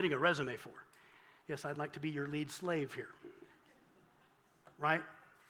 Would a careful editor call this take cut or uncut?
uncut